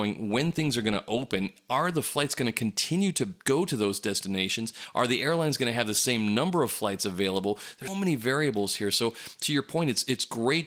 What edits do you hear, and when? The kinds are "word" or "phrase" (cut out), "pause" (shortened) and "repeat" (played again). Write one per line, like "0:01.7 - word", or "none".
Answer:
0:07.9 - word